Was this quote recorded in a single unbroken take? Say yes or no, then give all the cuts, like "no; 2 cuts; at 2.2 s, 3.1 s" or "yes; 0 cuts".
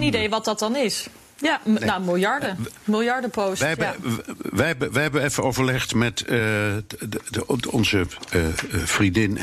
yes; 0 cuts